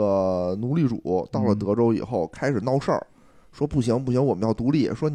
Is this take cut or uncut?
uncut